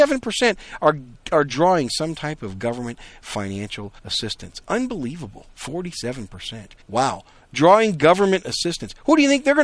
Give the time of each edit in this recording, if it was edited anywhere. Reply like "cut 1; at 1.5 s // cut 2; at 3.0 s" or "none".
cut 1; at 4.0 s // cut 2; at 6.8 s